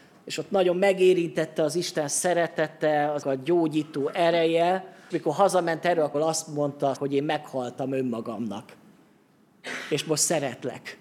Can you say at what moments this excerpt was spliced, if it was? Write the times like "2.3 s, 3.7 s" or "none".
3.2 s, 5.1 s, 6.1 s, 6.9 s